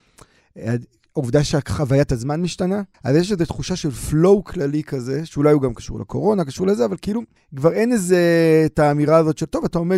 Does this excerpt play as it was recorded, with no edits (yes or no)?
no